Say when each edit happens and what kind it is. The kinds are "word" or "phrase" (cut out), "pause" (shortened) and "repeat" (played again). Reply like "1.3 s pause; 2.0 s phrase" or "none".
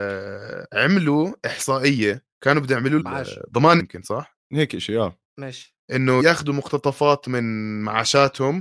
2.3 s pause; 3.0 s phrase; 3.8 s word; 4.4 s pause; 5.3 s pause; 6.2 s word